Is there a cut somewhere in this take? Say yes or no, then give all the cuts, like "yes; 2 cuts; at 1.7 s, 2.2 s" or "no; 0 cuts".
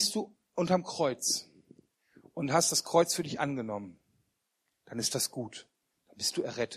no; 0 cuts